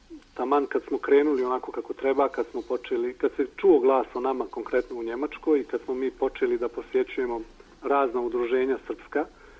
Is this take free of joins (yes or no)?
yes